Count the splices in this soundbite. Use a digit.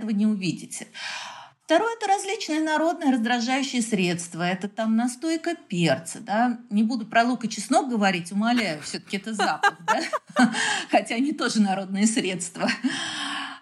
0